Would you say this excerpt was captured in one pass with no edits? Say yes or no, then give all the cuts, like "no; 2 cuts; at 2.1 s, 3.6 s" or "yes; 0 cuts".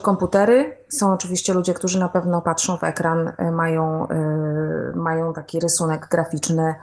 yes; 0 cuts